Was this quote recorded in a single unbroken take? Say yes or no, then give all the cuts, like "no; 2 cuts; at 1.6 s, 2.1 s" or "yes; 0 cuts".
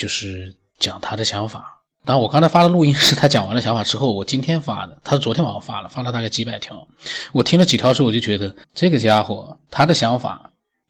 no; 2 cuts; at 1.9 s, 8.6 s